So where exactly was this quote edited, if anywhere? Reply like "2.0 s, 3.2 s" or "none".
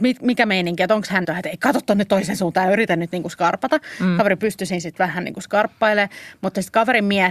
1.2 s